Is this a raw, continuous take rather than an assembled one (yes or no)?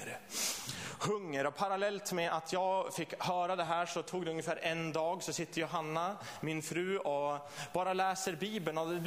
yes